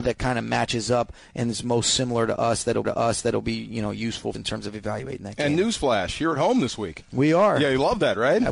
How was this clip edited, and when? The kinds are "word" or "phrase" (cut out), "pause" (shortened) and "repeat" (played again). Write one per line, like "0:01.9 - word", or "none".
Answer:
0:02.8 - repeat
0:04.3 - phrase

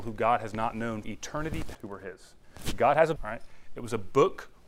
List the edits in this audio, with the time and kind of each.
0:01.0 - word
0:01.7 - word
0:03.2 - word

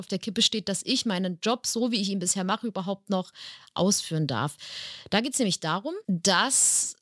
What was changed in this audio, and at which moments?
0:06.0 - pause

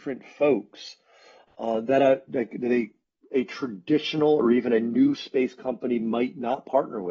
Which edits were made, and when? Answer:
none

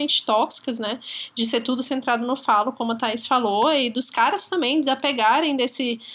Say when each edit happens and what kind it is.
none

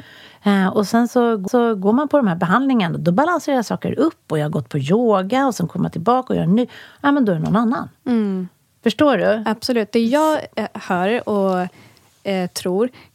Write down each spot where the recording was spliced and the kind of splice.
0:01.5 - repeat

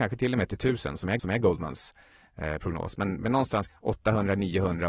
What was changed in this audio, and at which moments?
0:01.2 - repeat
0:03.7 - word

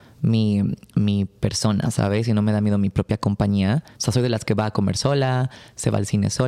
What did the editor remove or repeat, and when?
0:03.9 - pause

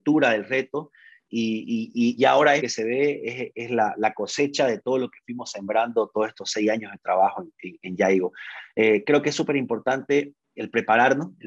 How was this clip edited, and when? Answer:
0:02.2 - word
0:02.6 - word
0:10.6 - word

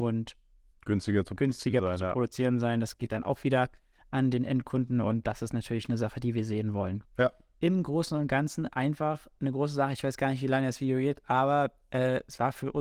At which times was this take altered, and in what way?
none

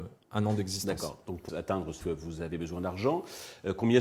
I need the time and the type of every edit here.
0:01.5 - word
0:02.0 - phrase

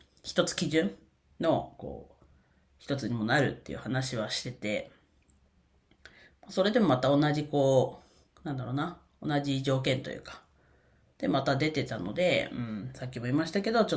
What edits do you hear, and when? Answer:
none

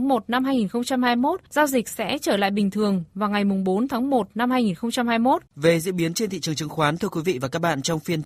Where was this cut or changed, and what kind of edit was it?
0:01.5 - pause
0:05.5 - pause

